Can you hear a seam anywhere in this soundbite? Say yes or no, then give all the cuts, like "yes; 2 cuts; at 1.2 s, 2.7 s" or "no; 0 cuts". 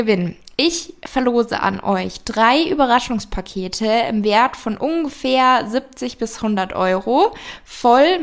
no; 0 cuts